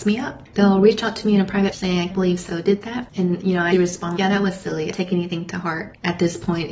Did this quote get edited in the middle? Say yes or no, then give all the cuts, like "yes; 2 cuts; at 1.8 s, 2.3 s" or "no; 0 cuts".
yes; 6 cuts; at 1.7 s, 2.1 s, 2.5 s, 3.7 s, 4.2 s, 4.9 s